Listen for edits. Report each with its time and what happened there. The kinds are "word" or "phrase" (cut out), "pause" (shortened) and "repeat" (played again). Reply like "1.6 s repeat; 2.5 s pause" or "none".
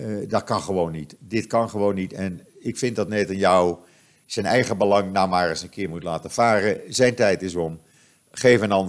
none

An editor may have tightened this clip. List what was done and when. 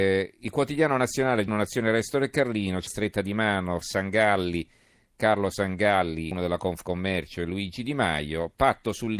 1.5 s word; 2.9 s word; 3.8 s word; 6.3 s phrase

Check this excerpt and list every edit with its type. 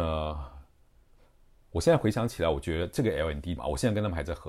3.6 s word

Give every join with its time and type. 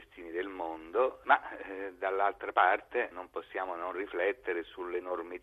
3.1 s word

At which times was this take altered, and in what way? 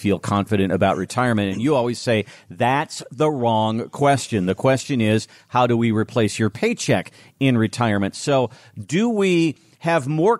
none

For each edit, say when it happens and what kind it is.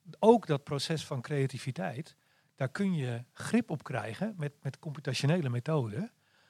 none

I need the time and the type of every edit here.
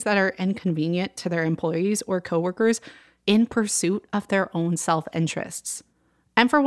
none

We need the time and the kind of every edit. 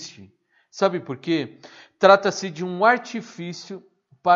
none

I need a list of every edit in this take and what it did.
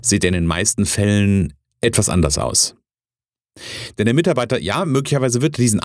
none

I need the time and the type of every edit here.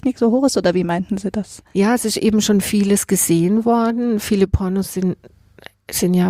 none

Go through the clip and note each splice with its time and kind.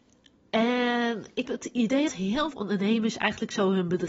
1.4 s word; 2.1 s word; 2.5 s word

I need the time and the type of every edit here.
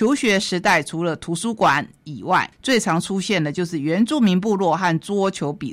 2.5 s pause

